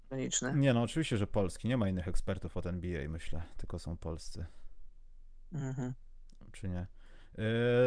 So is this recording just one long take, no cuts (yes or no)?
yes